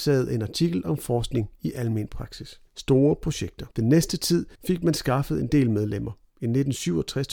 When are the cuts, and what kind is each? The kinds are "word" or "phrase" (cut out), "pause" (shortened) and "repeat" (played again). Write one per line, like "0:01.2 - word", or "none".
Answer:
0:02.7 - pause
0:03.7 - pause
0:04.5 - pause